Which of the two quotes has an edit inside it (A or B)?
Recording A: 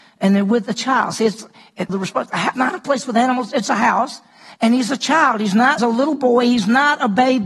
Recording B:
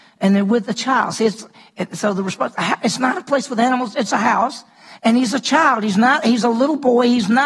A